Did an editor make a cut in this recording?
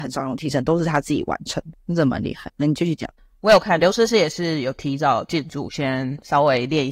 no; 0 cuts

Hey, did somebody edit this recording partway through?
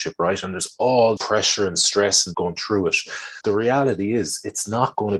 yes; 3 cuts; at 1.2 s, 2.3 s, 3.4 s

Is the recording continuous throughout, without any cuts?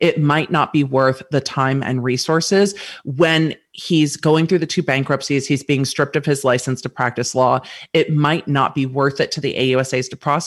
yes; 0 cuts

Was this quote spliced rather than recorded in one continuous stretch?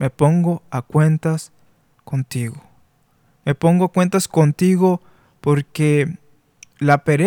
no; 0 cuts

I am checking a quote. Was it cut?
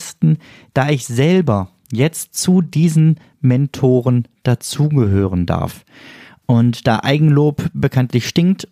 no; 0 cuts

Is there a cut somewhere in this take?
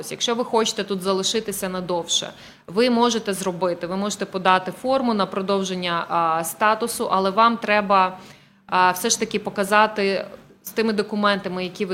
no; 0 cuts

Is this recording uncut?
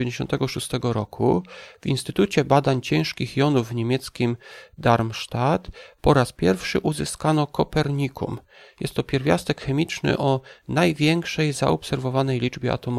yes; 0 cuts

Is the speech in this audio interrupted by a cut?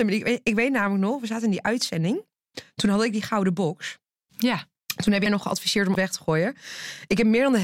yes; 2 cuts; at 5.3 s, 5.9 s

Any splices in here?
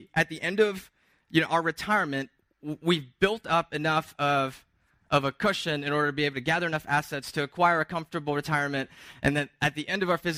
no; 0 cuts

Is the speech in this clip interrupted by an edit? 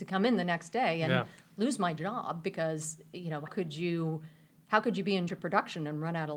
yes; 2 cuts; at 3.5 s, 5.3 s

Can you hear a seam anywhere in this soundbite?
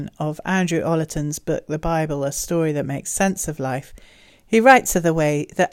no; 0 cuts

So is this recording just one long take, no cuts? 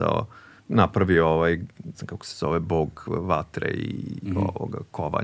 no; 1 cut; at 1.9 s

